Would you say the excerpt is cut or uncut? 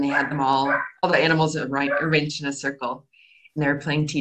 uncut